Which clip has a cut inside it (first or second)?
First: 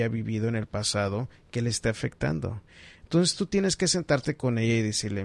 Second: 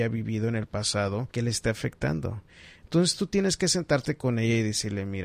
second